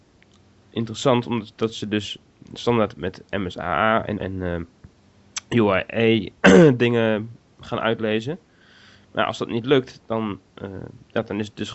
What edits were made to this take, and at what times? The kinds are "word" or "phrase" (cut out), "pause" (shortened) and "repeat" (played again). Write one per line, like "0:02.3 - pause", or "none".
0:02.9 - word
0:04.2 - word